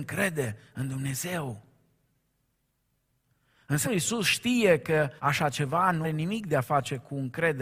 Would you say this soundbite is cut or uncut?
cut